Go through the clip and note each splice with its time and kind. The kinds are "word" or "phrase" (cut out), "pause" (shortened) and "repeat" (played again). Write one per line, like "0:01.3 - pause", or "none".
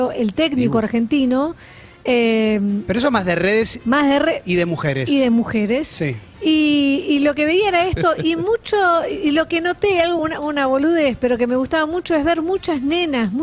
none